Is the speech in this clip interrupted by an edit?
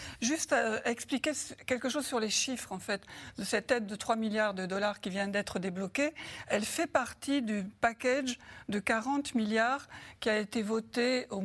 no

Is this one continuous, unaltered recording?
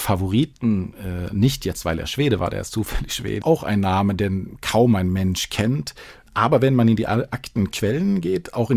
no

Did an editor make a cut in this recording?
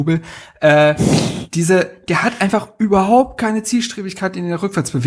no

